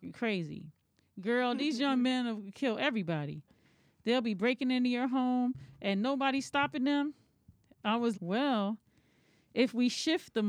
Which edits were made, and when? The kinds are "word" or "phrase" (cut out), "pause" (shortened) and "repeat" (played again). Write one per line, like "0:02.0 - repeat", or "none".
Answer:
0:08.1 - word